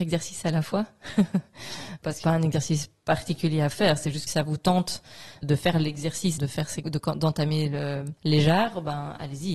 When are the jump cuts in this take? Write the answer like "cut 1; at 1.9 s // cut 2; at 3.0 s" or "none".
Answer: cut 1; at 2.2 s // cut 2; at 4.3 s // cut 3; at 5.4 s // cut 4; at 6.4 s // cut 5; at 6.8 s // cut 6; at 8.2 s